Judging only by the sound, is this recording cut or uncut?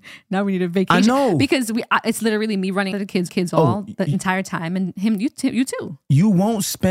cut